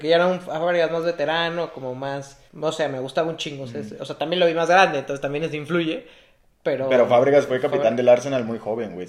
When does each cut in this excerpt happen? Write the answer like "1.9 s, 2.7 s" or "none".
2.5 s